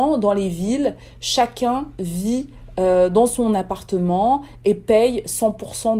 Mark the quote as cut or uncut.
uncut